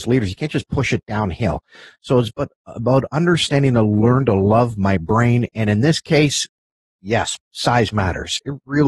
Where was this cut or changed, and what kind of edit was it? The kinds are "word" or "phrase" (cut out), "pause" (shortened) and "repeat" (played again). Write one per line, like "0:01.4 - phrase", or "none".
none